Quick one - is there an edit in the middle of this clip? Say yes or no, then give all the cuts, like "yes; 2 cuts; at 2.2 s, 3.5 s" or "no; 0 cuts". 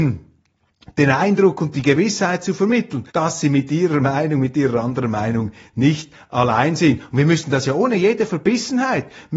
yes; 1 cut; at 3.1 s